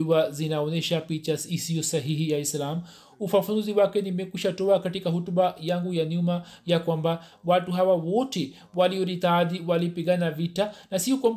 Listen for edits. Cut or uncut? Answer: uncut